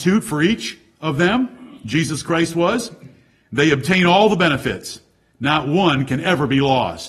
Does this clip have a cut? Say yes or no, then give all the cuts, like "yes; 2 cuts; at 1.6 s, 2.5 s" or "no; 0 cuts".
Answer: no; 0 cuts